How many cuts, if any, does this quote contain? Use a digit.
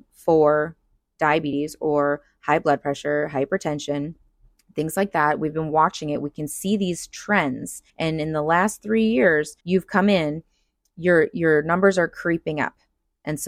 2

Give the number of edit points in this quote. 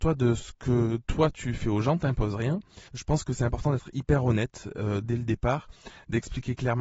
1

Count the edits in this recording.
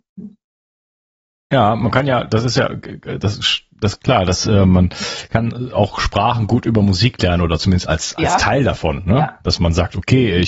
0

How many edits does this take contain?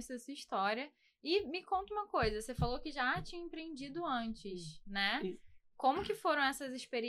0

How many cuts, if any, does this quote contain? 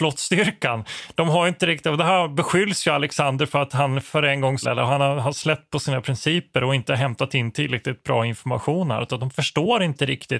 2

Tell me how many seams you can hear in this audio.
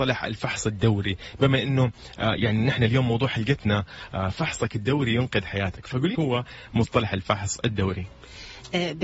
1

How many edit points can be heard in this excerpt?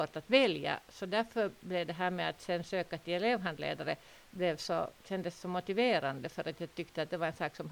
0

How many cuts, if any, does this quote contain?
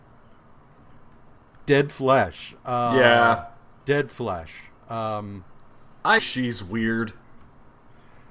2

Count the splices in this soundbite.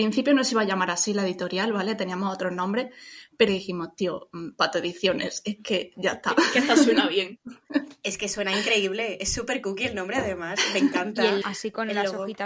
2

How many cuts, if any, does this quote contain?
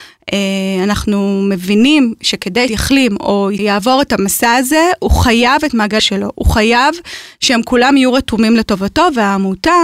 2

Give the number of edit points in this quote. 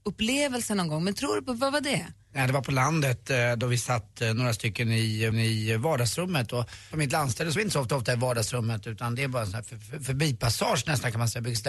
4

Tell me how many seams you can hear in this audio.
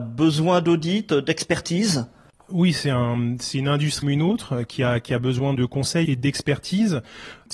3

